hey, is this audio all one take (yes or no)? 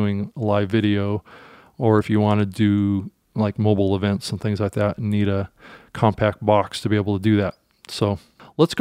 yes